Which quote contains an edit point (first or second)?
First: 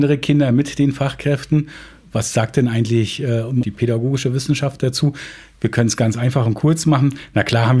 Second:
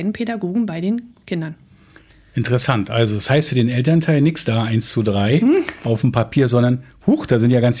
first